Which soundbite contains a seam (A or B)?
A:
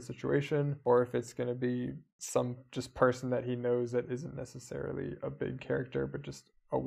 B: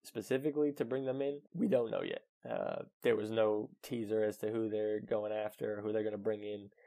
B